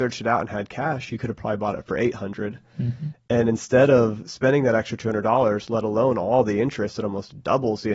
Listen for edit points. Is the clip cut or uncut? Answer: uncut